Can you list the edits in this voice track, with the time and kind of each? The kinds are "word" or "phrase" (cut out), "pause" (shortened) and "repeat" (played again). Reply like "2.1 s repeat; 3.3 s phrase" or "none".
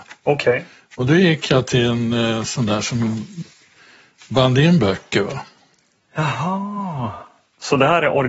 none